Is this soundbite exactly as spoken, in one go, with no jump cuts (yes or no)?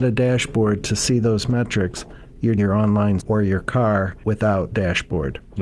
no